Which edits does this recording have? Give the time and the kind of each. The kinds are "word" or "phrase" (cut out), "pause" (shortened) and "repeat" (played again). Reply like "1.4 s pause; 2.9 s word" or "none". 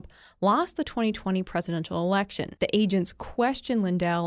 2.6 s pause